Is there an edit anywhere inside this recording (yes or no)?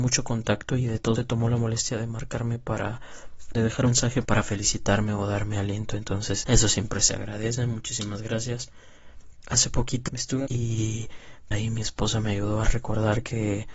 yes